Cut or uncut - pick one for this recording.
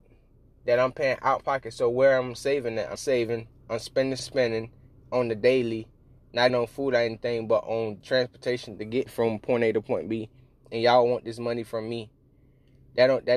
cut